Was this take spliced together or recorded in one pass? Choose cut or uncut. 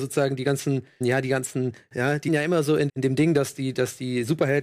cut